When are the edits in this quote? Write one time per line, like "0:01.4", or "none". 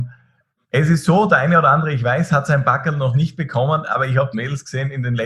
0:04.3